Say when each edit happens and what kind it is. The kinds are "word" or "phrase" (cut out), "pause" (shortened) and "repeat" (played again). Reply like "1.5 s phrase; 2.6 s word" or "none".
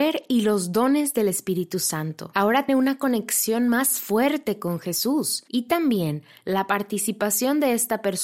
2.7 s word